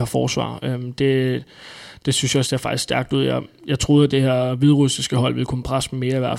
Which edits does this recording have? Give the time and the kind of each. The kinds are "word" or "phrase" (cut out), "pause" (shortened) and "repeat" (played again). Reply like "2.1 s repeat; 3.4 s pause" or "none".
2.4 s word